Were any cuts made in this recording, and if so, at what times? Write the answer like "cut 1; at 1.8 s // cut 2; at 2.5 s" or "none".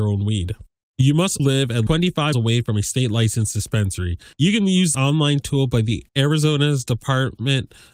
cut 1; at 1.4 s // cut 2; at 1.9 s // cut 3; at 2.3 s // cut 4; at 4.3 s // cut 5; at 4.9 s // cut 6; at 6.1 s